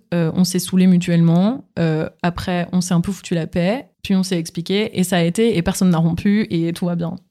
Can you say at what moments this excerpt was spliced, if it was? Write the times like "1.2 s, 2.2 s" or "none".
3.9 s